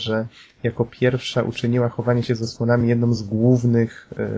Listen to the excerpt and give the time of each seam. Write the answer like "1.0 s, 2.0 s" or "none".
none